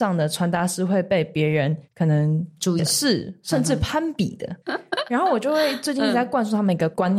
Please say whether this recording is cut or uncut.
cut